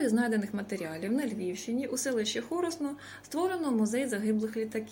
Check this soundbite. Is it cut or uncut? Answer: uncut